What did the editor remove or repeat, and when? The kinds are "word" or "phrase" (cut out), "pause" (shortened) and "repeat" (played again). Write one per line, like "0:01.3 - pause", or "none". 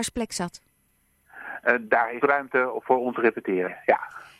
0:02.2 - word
0:03.1 - word